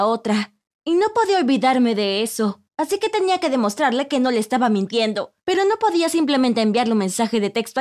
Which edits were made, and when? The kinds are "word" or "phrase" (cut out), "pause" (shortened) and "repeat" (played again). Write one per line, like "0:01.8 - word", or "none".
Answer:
0:02.7 - pause
0:05.4 - pause